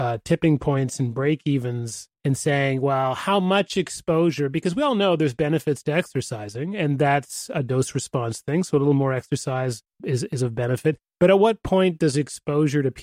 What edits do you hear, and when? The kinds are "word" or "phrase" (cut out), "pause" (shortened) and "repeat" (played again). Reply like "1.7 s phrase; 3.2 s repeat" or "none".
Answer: 2.1 s pause; 9.9 s pause